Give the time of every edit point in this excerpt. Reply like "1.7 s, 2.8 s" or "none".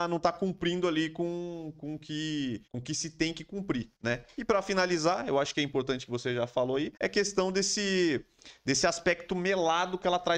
2.7 s, 4.0 s, 7.0 s